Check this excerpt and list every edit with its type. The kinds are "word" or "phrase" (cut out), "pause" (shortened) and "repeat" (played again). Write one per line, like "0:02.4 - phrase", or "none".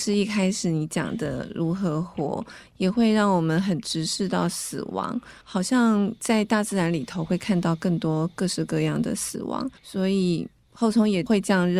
0:05.4 - pause
0:09.8 - pause